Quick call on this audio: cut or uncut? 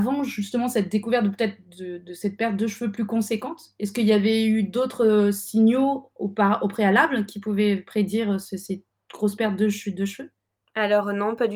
uncut